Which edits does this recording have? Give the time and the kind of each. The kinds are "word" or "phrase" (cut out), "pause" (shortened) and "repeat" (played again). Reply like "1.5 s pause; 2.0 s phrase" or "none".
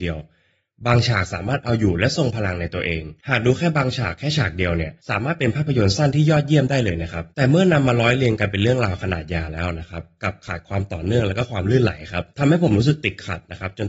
3.2 s pause; 5.0 s pause; 7.3 s pause; 12.3 s pause